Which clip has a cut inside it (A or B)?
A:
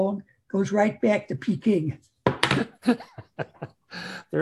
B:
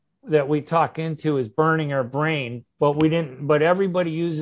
B